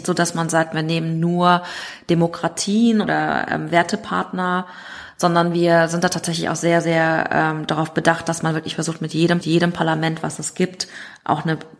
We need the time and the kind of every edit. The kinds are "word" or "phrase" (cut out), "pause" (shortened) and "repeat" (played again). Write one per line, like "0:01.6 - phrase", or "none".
0:03.0 - word
0:09.4 - repeat